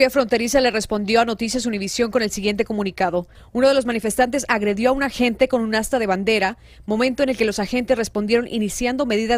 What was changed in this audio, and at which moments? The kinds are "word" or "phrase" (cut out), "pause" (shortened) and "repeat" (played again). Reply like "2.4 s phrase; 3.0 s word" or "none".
none